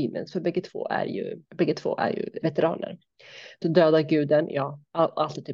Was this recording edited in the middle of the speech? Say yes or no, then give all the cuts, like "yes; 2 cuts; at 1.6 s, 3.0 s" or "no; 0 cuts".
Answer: yes; 3 cuts; at 1.4 s, 2.4 s, 3.6 s